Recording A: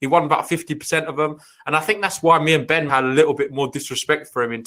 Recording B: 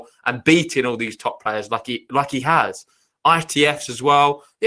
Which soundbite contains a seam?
A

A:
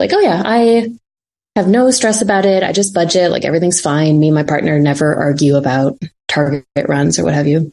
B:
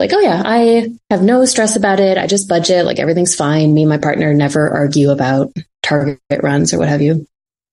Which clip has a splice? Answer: B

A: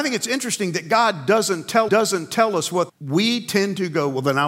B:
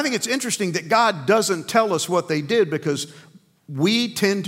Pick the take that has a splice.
A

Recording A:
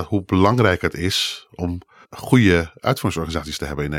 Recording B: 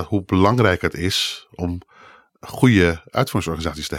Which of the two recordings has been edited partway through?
A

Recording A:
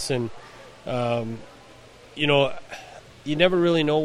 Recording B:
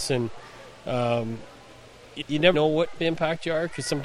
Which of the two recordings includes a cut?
B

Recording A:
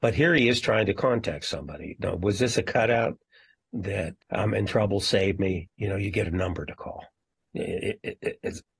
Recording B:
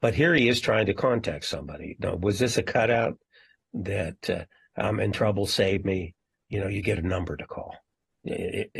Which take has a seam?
A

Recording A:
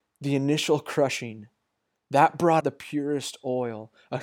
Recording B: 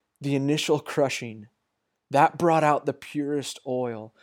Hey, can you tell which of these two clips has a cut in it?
A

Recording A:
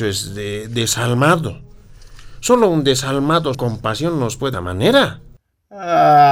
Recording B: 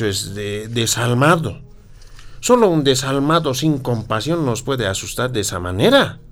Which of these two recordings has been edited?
A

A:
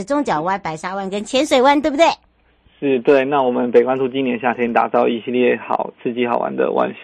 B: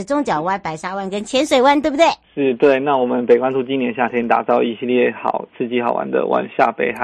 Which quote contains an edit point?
B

